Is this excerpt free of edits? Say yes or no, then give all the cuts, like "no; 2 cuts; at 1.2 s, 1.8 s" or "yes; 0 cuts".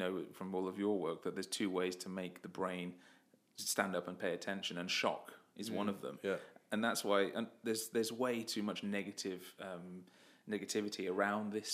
yes; 0 cuts